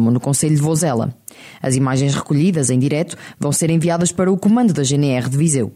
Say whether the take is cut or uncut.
uncut